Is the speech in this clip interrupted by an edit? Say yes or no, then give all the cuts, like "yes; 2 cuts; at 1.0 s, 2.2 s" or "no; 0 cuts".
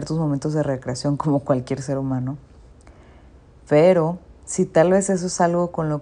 no; 0 cuts